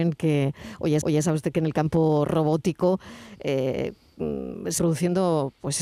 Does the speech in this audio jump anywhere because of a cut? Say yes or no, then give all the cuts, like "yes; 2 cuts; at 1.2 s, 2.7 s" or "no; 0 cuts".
yes; 2 cuts; at 1.0 s, 4.8 s